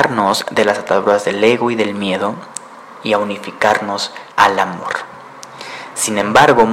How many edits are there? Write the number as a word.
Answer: one